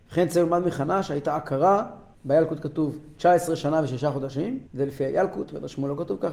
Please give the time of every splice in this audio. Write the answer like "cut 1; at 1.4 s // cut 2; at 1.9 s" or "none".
cut 1; at 2.1 s // cut 2; at 4.7 s